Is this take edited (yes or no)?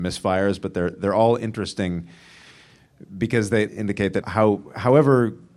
yes